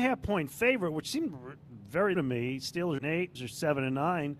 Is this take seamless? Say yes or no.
no